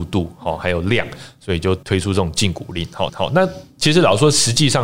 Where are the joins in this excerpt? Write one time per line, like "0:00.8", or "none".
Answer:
0:01.8
0:03.1